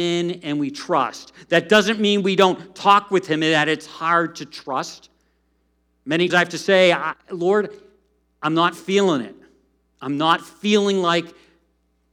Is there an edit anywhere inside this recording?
yes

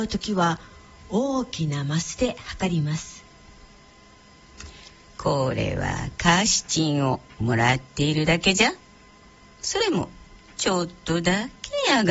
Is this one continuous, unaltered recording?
yes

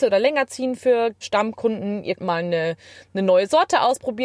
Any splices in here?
yes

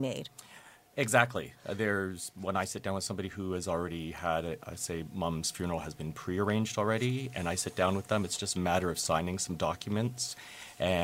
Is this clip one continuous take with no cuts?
yes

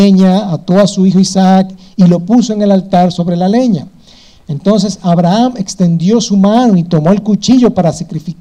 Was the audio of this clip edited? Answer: no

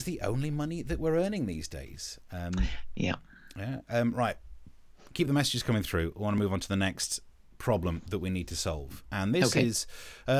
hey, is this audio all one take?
yes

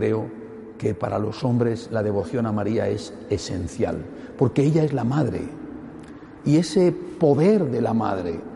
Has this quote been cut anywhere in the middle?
no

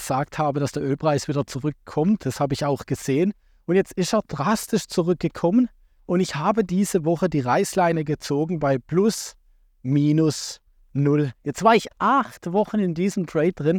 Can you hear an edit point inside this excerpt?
no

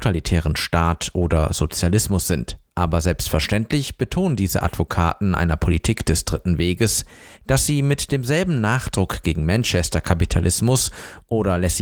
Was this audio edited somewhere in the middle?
yes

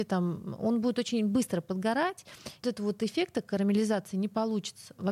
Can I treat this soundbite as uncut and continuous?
no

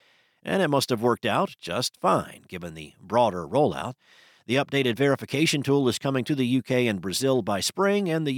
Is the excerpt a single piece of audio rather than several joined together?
yes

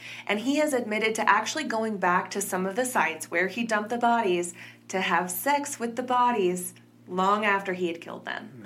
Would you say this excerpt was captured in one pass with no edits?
yes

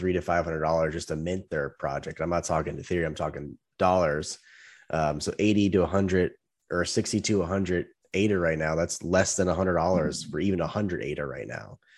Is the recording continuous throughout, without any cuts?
yes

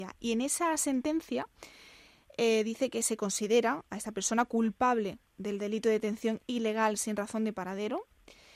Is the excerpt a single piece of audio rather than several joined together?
yes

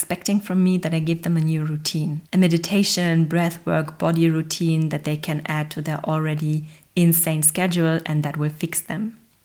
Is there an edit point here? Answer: no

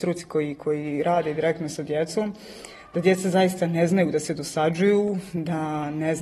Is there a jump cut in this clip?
no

